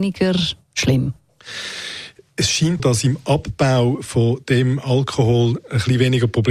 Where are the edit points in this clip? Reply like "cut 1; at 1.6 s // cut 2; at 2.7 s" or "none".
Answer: cut 1; at 2.8 s